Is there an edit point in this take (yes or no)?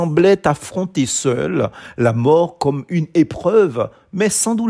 no